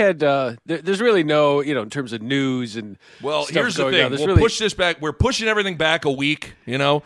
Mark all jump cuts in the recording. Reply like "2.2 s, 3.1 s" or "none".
none

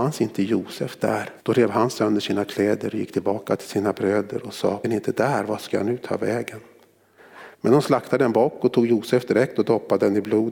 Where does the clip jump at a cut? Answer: 1.4 s, 4.8 s, 7.5 s

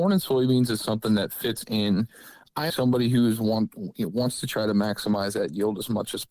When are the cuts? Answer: 2.7 s

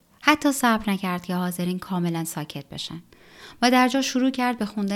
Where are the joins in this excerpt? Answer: none

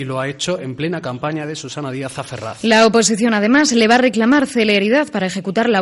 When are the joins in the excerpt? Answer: none

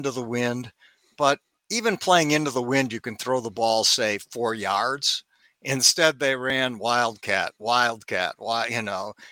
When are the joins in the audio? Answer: none

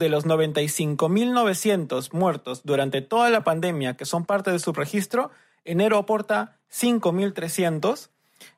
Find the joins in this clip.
none

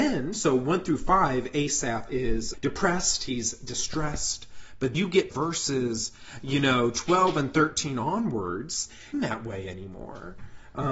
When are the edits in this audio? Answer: 2.5 s, 4.9 s, 5.3 s, 9.1 s

